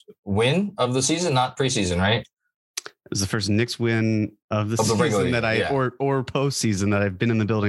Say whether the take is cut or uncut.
uncut